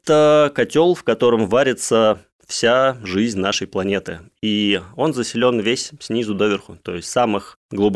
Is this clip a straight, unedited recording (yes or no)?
yes